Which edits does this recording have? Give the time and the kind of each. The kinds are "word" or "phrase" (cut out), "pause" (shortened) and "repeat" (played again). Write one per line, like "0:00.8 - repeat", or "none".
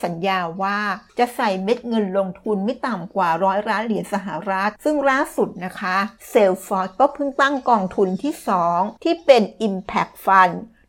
0:01.1 - pause
0:04.8 - pause
0:06.2 - pause
0:09.0 - pause